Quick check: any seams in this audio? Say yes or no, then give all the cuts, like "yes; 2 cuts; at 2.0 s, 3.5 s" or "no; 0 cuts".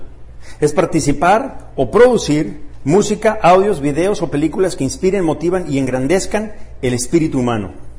no; 0 cuts